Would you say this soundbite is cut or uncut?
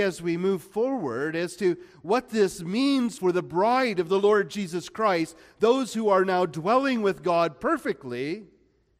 cut